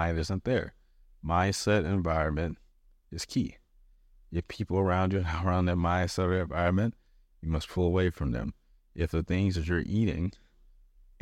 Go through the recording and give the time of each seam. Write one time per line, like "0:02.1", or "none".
none